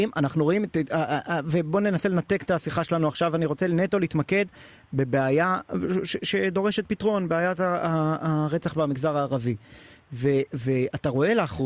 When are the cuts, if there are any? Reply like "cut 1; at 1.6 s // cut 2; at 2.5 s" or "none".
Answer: none